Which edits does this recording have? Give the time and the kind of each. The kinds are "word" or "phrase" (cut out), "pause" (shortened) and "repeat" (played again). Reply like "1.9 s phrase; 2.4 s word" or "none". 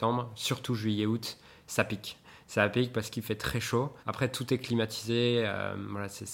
4.0 s pause